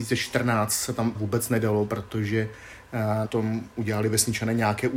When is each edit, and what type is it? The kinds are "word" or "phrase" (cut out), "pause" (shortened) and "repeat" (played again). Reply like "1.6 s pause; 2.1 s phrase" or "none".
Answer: 1.1 s word; 3.2 s word